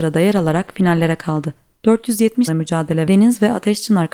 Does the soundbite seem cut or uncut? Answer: cut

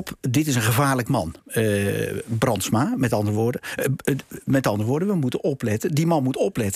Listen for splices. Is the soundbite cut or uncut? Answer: uncut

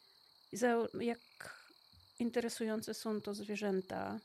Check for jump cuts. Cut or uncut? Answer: cut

